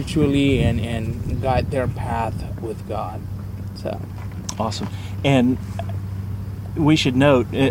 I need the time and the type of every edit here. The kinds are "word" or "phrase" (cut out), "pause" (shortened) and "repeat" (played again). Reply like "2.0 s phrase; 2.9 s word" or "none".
2.6 s word